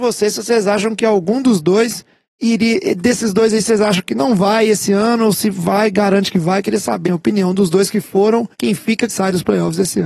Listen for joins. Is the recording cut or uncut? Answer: cut